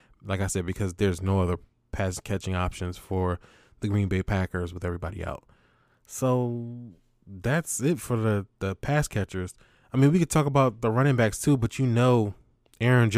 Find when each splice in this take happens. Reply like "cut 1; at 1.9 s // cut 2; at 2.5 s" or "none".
none